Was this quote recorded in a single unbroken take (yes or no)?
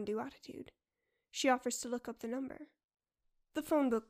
yes